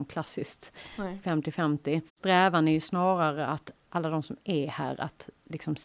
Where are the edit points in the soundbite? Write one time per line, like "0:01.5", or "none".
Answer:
0:02.1

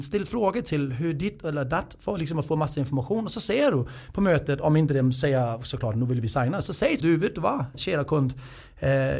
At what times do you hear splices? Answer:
0:07.0

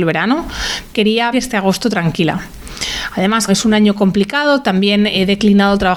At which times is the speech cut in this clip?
0:00.9
0:01.3
0:03.5

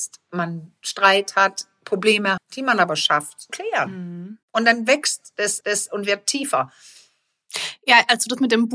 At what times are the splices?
0:02.4
0:03.5
0:04.4
0:05.6

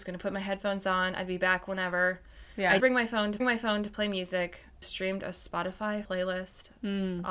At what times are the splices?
0:02.8
0:03.4
0:04.8
0:06.0

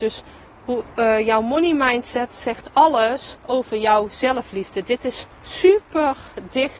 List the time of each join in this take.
0:03.4
0:05.3

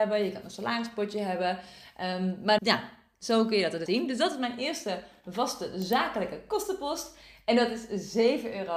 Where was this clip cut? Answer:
0:02.6
0:03.9

